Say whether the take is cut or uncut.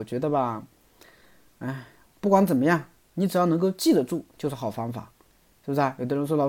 uncut